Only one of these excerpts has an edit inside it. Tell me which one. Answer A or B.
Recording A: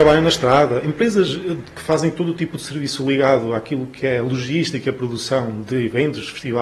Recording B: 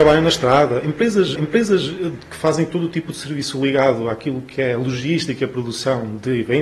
B